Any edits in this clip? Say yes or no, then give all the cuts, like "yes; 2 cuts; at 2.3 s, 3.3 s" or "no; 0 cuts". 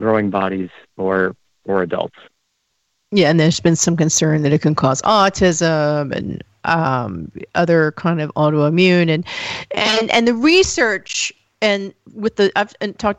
no; 0 cuts